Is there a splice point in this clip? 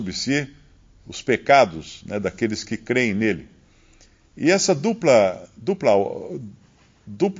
no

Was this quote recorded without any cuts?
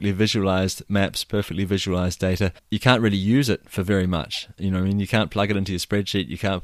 no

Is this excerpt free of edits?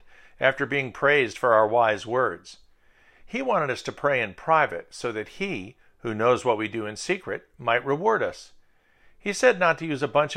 yes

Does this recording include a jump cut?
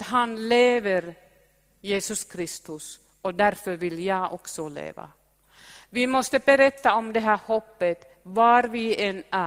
no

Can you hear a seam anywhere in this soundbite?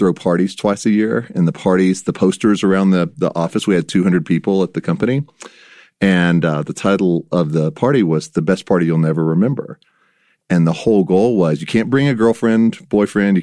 no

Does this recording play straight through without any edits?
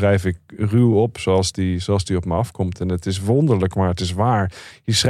yes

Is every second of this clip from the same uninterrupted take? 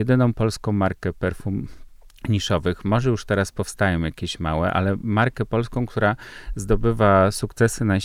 yes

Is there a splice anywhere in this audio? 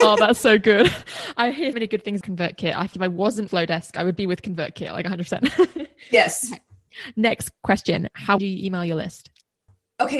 yes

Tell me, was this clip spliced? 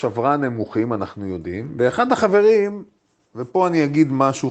no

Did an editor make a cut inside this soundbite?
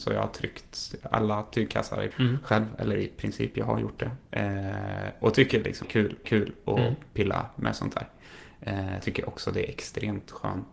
yes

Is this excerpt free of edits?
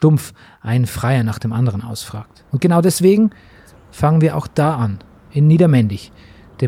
no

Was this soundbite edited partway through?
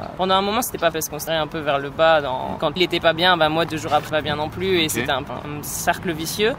yes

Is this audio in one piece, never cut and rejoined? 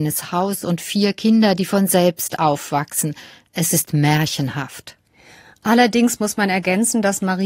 yes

